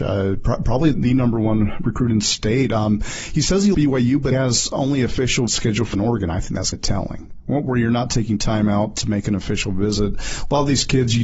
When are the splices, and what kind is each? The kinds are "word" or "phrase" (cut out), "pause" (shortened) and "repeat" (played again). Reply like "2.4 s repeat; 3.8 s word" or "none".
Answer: 0.9 s word; 3.7 s word; 4.3 s word; 5.5 s word; 5.9 s word; 6.7 s word